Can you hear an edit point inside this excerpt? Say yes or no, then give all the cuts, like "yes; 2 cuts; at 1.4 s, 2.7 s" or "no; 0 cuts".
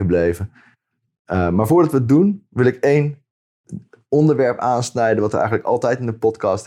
no; 0 cuts